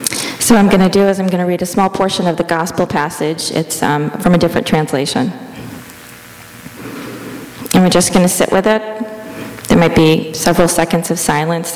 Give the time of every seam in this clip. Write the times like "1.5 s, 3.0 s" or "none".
none